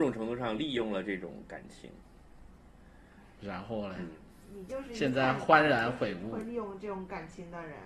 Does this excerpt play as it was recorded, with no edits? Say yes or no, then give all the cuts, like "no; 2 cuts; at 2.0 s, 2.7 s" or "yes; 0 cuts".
yes; 0 cuts